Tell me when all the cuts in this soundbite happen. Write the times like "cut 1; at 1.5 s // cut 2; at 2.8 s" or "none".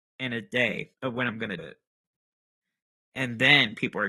cut 1; at 0.9 s // cut 2; at 1.6 s